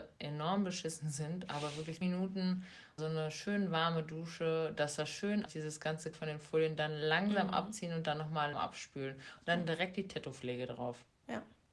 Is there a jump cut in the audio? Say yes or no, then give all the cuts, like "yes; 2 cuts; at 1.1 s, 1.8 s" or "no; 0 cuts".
yes; 5 cuts; at 2.0 s, 3.0 s, 5.5 s, 6.1 s, 8.5 s